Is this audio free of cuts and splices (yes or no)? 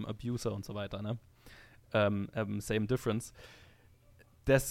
yes